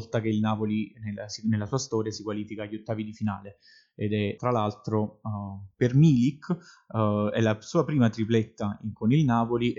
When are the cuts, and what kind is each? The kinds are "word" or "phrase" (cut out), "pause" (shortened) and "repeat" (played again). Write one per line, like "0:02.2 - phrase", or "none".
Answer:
0:04.4 - word